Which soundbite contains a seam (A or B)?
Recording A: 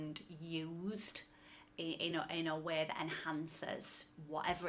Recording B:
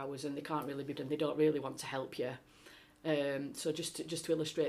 B